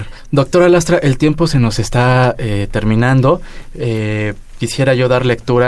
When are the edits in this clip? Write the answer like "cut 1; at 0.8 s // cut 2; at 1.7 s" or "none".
none

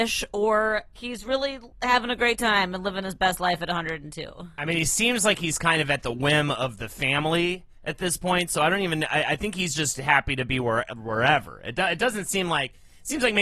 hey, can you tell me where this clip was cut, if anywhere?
cut 1; at 1.0 s // cut 2; at 1.7 s

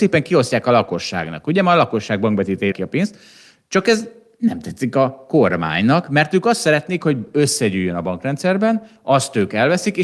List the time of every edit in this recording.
cut 1; at 2.7 s

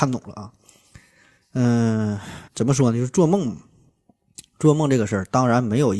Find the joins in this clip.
cut 1; at 2.5 s

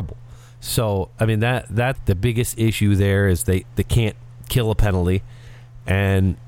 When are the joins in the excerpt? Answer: cut 1; at 1.9 s

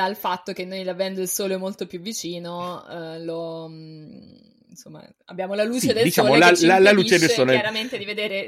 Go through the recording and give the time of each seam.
none

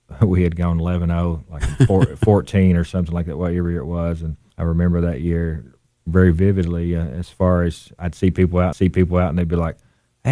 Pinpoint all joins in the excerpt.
cut 1; at 4.5 s // cut 2; at 6.0 s // cut 3; at 8.7 s

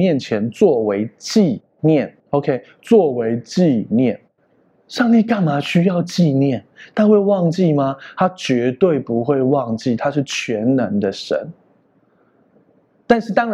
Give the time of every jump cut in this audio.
cut 1; at 2.2 s // cut 2; at 4.4 s

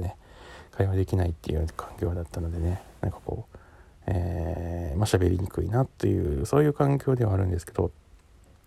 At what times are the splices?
none

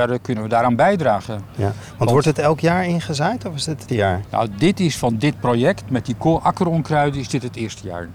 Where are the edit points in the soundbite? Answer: cut 1; at 3.9 s // cut 2; at 5.8 s

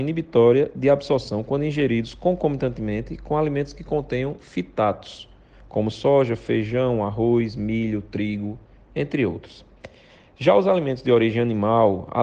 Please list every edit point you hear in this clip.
none

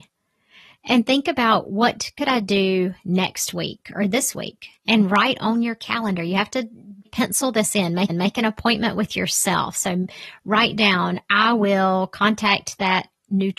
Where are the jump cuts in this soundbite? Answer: cut 1; at 4.8 s // cut 2; at 7.1 s // cut 3; at 8.1 s

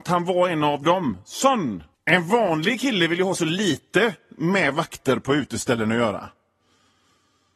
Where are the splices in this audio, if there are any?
cut 1; at 1.9 s

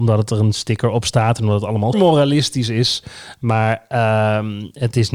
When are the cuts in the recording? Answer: cut 1; at 1.9 s

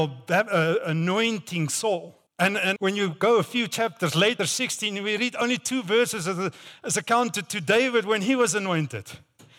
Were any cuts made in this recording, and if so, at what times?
cut 1; at 2.3 s // cut 2; at 2.8 s // cut 3; at 4.4 s

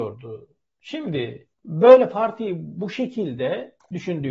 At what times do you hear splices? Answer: cut 1; at 1.5 s

